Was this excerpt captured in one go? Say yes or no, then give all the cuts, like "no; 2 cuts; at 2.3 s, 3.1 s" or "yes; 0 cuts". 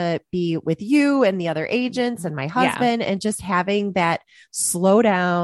yes; 0 cuts